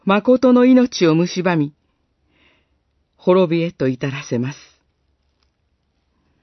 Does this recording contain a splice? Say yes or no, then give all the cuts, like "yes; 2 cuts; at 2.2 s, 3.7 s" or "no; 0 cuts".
no; 0 cuts